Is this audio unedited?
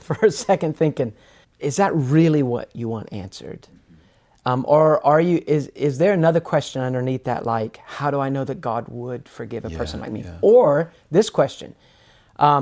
no; 1 cut; at 1.4 s

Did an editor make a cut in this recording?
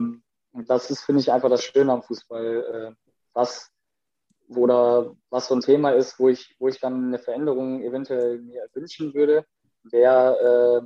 no; 0 cuts

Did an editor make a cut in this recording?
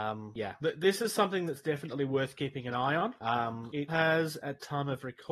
yes; 1 cut; at 3.9 s

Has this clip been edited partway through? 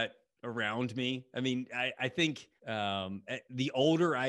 yes; 1 cut; at 2.6 s

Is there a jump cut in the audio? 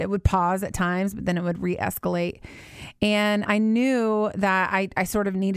yes; 1 cut; at 3.5 s

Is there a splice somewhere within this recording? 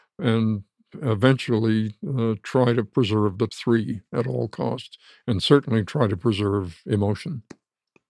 yes; 1 cut; at 3.5 s

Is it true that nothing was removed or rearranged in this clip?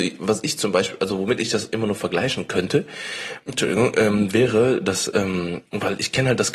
no; 2 cuts; at 3.4 s, 5.7 s

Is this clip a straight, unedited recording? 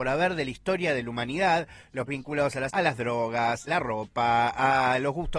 no; 3 cuts; at 2.1 s, 2.7 s, 3.7 s

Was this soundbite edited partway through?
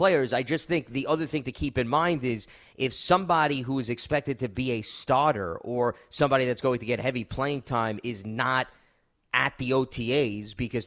no; 0 cuts

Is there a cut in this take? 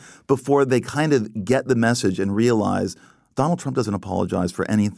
no; 0 cuts

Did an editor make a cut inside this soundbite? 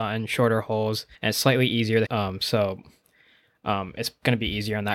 yes; 2 cuts; at 1.1 s, 2.1 s

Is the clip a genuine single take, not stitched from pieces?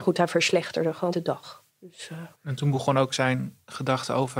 no; 3 cuts; at 1.1 s, 1.7 s, 2.3 s

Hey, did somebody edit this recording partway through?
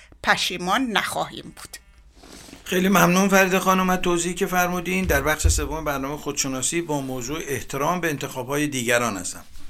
yes; 1 cut; at 2.6 s

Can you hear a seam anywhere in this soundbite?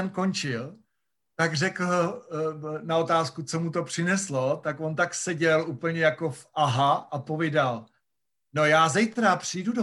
no; 0 cuts

